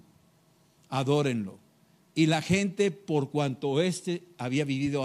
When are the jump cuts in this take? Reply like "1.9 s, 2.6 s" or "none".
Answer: none